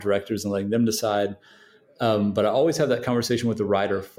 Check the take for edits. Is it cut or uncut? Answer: uncut